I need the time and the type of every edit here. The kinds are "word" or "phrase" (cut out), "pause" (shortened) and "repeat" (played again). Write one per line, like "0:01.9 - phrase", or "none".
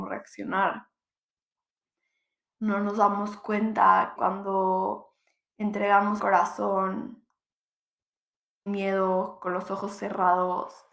0:04.2 - word
0:06.2 - word
0:08.7 - word